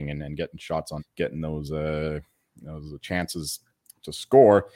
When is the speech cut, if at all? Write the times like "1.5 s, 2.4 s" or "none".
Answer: 1.0 s

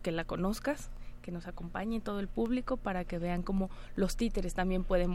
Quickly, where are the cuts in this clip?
none

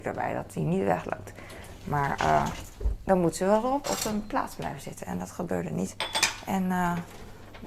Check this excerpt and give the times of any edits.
3.8 s

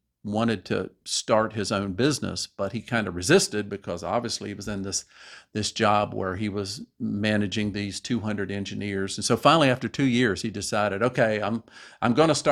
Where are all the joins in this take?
none

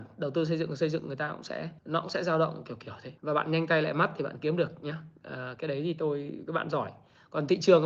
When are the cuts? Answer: 1.8 s, 3.2 s

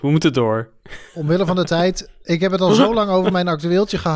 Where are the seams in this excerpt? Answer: none

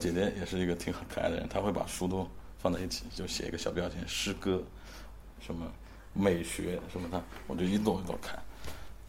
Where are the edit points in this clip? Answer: 5.4 s

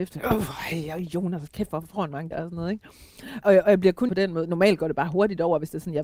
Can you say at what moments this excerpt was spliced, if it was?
2.3 s, 3.4 s, 4.1 s

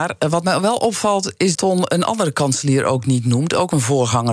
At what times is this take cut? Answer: 1.5 s

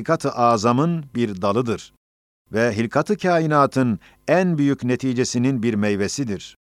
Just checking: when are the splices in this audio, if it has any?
none

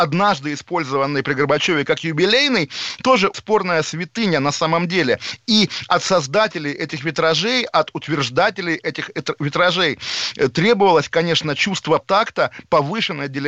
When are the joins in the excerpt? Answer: 3.3 s, 12.0 s

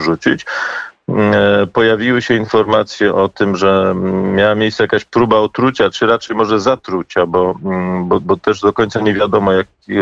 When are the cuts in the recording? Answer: none

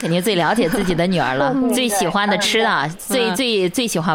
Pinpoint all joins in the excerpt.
none

